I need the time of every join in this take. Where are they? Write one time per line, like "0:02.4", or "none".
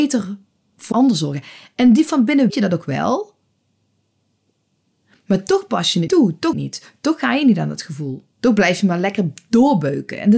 0:00.9
0:02.5
0:06.1
0:06.5
0:08.3